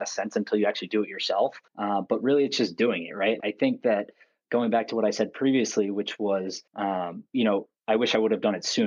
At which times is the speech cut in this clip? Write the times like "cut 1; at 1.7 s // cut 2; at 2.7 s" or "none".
cut 1; at 1.7 s // cut 2; at 3.4 s // cut 3; at 6.7 s